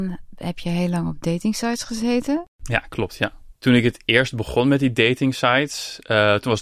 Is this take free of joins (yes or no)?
no